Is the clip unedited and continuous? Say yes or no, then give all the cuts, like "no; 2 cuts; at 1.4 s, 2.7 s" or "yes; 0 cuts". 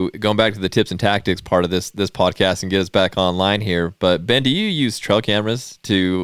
yes; 0 cuts